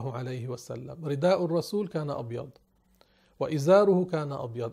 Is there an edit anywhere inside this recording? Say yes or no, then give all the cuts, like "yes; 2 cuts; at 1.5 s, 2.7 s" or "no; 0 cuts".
no; 0 cuts